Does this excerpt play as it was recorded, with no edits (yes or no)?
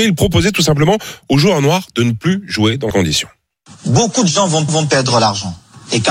no